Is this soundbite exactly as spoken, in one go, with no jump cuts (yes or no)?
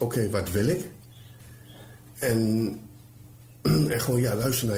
yes